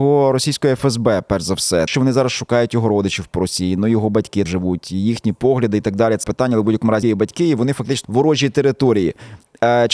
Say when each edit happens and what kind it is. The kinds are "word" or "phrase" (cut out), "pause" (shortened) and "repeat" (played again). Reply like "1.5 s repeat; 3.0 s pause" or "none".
1.9 s word; 4.5 s word; 6.2 s word; 7.0 s word; 8.0 s word